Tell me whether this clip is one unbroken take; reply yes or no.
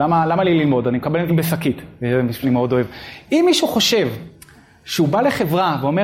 no